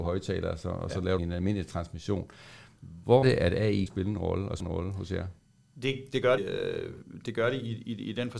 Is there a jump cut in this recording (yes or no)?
yes